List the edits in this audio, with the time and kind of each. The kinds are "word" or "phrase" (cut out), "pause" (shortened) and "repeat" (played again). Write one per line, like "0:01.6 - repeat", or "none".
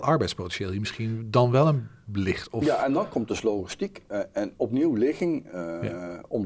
none